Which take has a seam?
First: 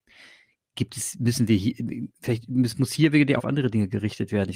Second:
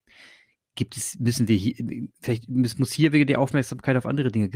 first; 1 cut; at 3.4 s

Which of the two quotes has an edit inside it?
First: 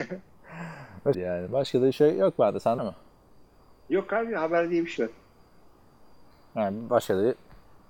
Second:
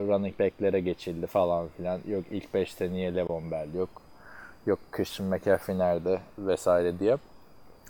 first; 3 cuts; at 1.1 s, 2.8 s, 5.0 s

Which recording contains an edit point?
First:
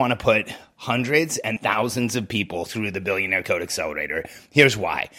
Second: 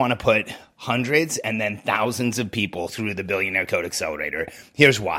first; 1 cut; at 1.6 s

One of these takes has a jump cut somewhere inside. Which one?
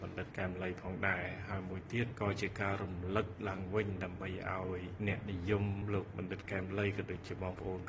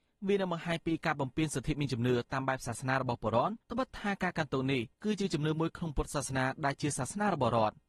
second; 2 cuts; at 3.6 s, 4.9 s

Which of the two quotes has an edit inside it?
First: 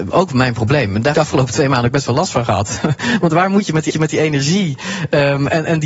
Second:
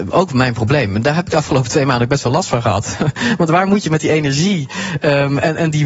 first; 2 cuts; at 1.1 s, 3.9 s

